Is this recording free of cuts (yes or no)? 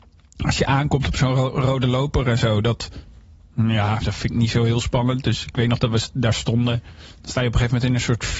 yes